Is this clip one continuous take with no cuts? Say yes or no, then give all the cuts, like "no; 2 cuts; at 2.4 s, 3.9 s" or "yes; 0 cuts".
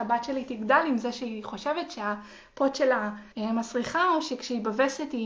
no; 1 cut; at 3.3 s